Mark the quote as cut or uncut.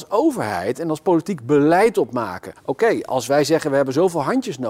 cut